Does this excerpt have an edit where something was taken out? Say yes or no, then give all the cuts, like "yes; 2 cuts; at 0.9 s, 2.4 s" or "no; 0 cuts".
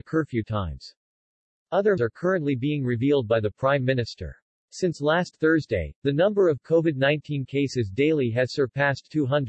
yes; 1 cut; at 2.0 s